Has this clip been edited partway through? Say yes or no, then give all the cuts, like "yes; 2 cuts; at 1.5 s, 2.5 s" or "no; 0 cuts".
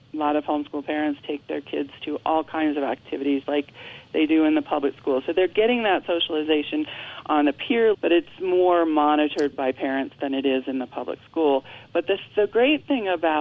yes; 3 cuts; at 3.4 s, 7.9 s, 9.5 s